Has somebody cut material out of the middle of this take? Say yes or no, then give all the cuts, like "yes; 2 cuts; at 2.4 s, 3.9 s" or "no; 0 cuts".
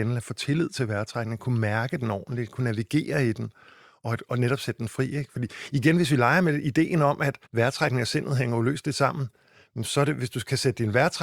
yes; 1 cut; at 7.5 s